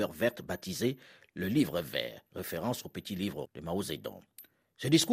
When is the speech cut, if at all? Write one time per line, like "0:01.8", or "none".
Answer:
0:02.3
0:03.5